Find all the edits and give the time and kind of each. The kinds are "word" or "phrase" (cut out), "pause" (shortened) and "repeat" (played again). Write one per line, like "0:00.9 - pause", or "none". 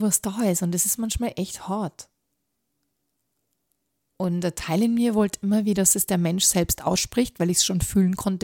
none